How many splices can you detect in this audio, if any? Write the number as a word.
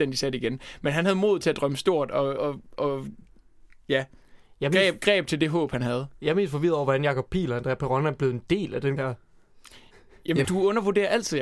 three